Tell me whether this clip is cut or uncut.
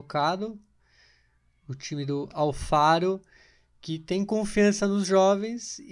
uncut